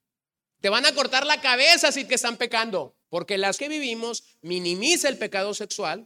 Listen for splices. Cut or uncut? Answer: cut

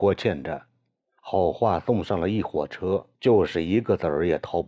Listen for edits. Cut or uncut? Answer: cut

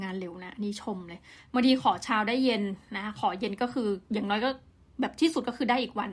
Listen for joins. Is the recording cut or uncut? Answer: uncut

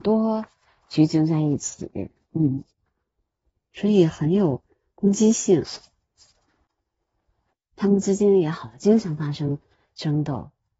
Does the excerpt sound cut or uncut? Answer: uncut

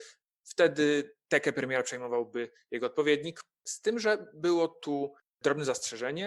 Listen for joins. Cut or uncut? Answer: uncut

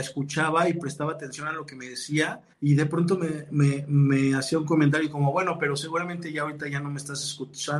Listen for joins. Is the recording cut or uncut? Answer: cut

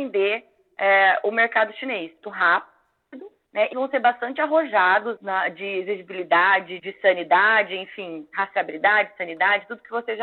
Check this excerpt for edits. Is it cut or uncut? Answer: cut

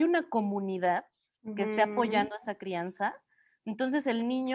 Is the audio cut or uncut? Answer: uncut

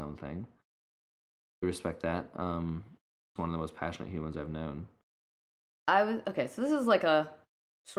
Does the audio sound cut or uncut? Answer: cut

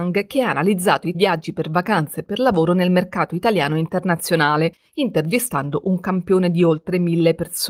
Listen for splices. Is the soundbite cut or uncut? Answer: cut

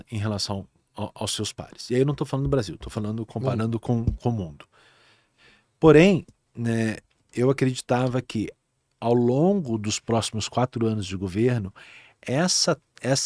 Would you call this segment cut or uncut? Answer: uncut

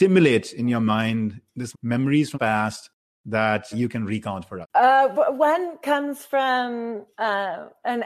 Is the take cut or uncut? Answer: cut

